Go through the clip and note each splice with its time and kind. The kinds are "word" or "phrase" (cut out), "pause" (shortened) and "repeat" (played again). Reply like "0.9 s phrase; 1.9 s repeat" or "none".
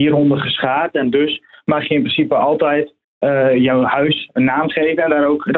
none